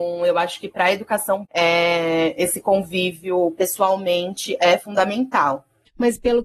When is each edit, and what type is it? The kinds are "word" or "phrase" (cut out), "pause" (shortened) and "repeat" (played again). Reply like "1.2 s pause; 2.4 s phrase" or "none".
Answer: 1.4 s word